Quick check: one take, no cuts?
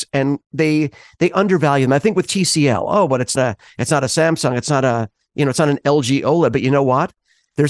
no; 1 cut; at 3.4 s

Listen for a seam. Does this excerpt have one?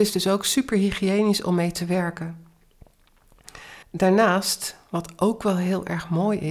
yes; 1 cut; at 3.8 s

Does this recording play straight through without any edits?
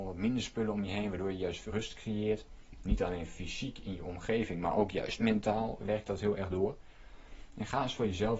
no; 2 cuts; at 1.7 s, 5.8 s

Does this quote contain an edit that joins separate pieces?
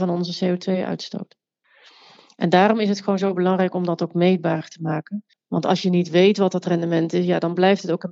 yes; 1 cut; at 5.3 s

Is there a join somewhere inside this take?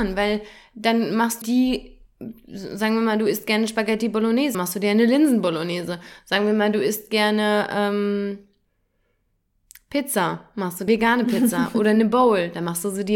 yes; 3 cuts; at 1.4 s, 4.5 s, 10.9 s

